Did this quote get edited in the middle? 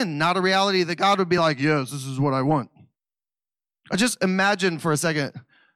no; 0 cuts

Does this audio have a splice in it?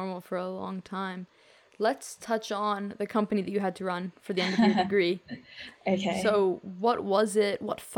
no; 0 cuts

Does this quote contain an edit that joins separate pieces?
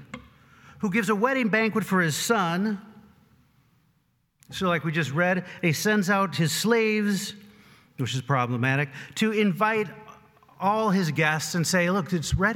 no; 0 cuts

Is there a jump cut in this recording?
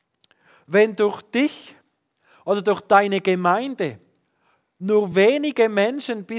no; 0 cuts

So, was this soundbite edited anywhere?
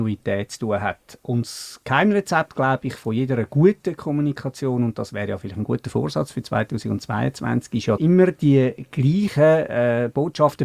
yes; 1 cut; at 8.0 s

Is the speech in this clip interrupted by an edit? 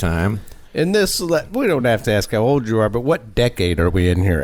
no; 0 cuts

